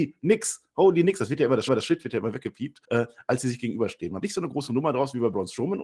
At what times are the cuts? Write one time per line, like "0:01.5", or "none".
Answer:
0:01.7
0:02.8
0:04.2